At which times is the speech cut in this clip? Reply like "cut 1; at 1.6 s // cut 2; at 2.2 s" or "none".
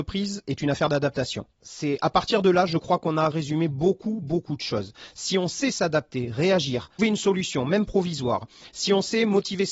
cut 1; at 1.6 s // cut 2; at 3.3 s // cut 3; at 7.0 s

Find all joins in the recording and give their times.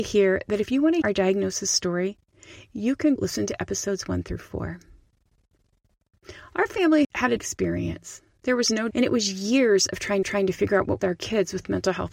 cut 1; at 1.0 s // cut 2; at 3.2 s // cut 3; at 7.0 s // cut 4; at 7.4 s // cut 5; at 8.9 s // cut 6; at 10.2 s // cut 7; at 11.0 s

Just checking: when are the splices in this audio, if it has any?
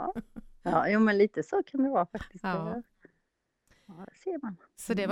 none

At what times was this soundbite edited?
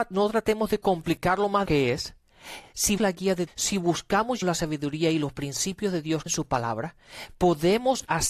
cut 1; at 1.7 s // cut 2; at 3.0 s // cut 3; at 3.5 s // cut 4; at 4.4 s // cut 5; at 6.3 s

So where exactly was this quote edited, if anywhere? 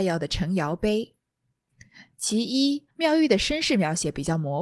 cut 1; at 2.9 s

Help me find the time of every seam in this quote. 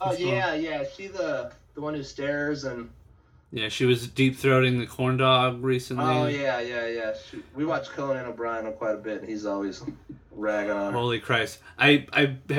none

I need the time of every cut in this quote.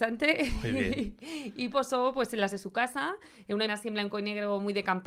cut 1; at 1.7 s // cut 2; at 2.5 s // cut 3; at 3.7 s

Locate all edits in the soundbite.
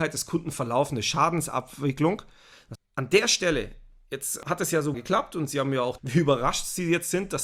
cut 1; at 2.7 s // cut 2; at 4.9 s // cut 3; at 6.0 s

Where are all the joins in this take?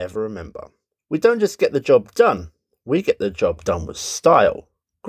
none

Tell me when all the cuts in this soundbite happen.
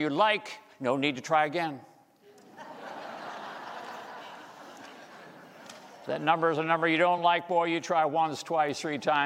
none

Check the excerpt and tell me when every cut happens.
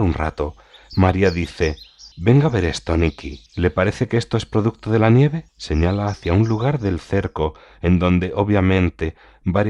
cut 1; at 2.1 s // cut 2; at 3.5 s // cut 3; at 5.5 s

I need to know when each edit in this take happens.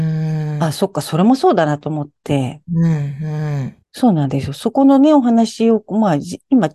cut 1; at 3.8 s

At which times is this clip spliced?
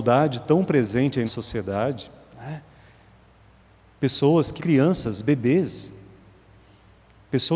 cut 1; at 1.3 s // cut 2; at 4.6 s

